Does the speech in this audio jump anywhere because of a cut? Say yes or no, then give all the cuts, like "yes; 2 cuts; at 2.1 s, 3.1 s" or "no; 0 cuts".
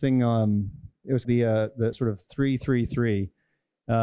yes; 2 cuts; at 1.2 s, 1.9 s